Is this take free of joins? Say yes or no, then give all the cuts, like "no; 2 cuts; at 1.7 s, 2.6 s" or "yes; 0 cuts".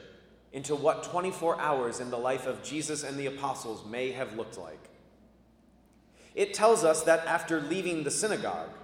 yes; 0 cuts